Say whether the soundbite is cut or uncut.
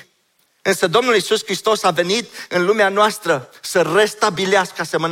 uncut